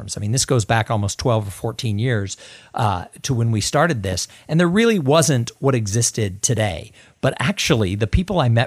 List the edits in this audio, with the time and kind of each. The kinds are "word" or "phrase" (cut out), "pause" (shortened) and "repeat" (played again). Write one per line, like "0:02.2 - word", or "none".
none